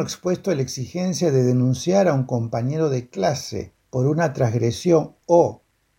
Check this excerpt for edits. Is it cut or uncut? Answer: cut